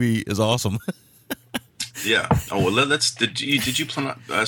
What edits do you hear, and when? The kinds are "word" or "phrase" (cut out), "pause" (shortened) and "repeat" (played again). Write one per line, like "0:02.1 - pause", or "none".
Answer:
none